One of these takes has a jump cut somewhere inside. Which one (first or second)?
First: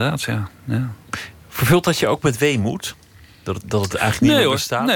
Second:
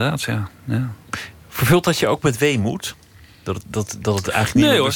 first